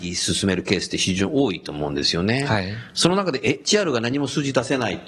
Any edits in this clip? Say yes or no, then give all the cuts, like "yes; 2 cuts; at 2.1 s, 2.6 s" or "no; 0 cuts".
no; 0 cuts